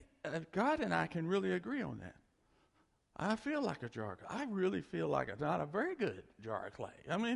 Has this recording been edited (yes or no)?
no